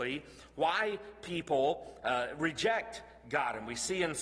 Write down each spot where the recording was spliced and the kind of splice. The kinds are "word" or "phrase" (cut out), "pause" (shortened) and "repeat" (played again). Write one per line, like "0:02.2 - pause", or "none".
none